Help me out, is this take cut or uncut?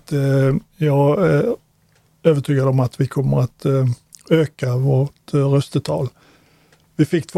uncut